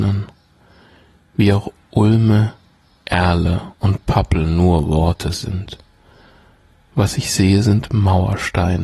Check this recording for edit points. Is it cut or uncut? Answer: uncut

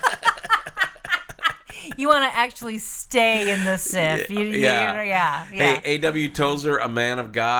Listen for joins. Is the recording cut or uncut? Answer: uncut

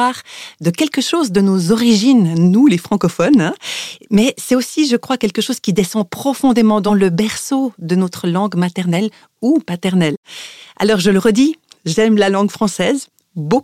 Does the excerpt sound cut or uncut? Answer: cut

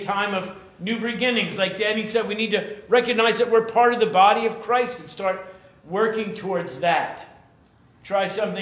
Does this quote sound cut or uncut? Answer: uncut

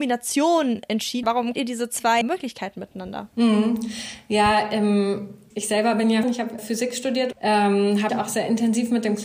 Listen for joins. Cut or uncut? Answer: cut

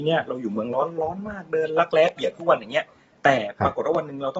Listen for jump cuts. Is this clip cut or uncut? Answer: uncut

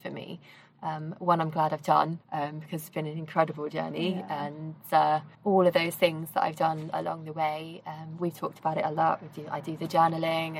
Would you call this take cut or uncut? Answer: cut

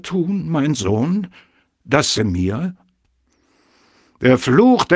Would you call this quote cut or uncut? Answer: cut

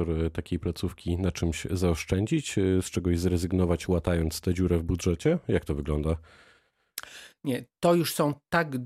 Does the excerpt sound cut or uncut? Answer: uncut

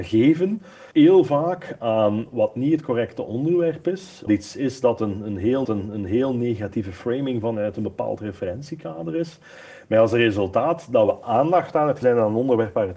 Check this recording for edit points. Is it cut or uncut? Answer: cut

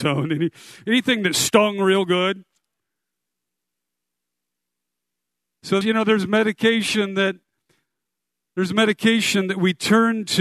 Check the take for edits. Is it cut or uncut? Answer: cut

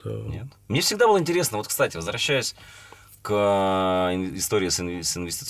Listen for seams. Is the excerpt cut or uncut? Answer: uncut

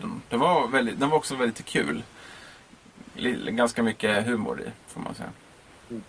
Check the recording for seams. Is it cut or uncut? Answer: uncut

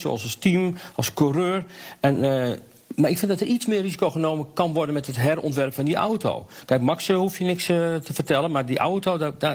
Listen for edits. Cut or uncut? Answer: uncut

